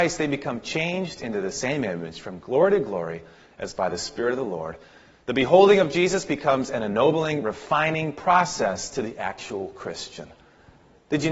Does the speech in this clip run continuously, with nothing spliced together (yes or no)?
yes